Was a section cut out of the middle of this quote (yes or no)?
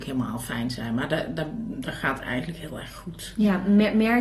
no